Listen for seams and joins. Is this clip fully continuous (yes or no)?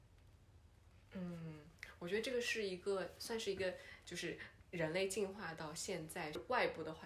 yes